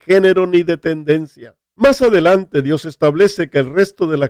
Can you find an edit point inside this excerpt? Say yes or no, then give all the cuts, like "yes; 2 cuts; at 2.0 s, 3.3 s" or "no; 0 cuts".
no; 0 cuts